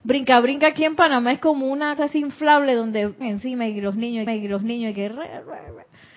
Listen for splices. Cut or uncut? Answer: cut